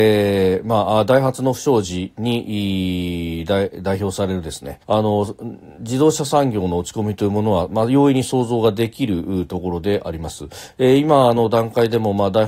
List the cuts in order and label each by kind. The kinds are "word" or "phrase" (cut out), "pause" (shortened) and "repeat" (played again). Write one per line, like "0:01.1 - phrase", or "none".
0:04.8 - pause